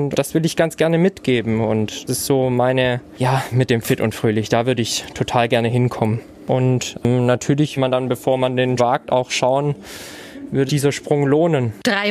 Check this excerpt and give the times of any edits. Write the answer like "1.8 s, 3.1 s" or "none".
2.1 s, 3.5 s, 7.8 s, 8.8 s, 10.7 s